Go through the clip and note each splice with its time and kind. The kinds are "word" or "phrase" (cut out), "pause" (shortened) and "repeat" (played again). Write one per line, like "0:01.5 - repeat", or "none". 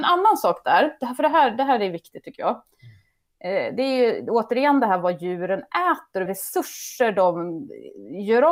0:06.3 - word

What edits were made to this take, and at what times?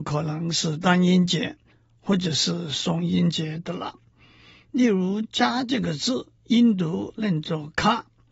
0:06.4 - pause

